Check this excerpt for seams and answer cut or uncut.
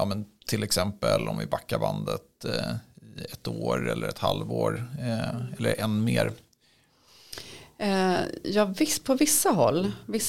uncut